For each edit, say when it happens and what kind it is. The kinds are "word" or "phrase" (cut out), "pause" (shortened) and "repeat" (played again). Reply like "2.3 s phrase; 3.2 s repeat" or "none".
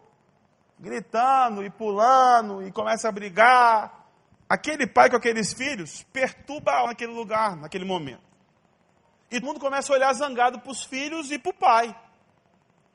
4.3 s pause; 6.9 s phrase; 9.4 s word